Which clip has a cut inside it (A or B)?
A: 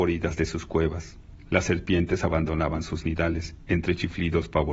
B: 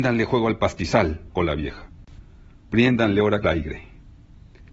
B